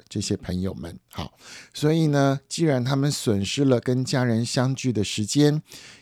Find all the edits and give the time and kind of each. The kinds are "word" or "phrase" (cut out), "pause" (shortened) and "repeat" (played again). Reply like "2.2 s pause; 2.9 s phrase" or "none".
1.0 s pause